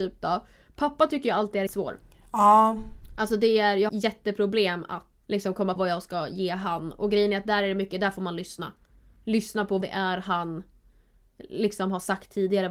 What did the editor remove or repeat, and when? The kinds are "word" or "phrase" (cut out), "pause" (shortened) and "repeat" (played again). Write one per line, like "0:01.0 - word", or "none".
0:01.7 - word
0:03.9 - word
0:05.2 - word
0:05.8 - word
0:09.8 - word